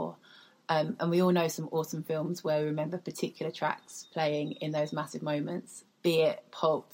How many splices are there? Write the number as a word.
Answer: one